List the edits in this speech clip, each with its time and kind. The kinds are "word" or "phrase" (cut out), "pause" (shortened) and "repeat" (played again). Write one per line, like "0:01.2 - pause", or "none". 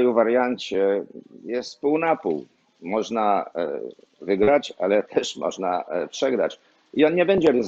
none